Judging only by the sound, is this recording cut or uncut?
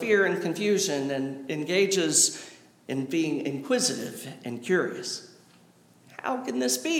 uncut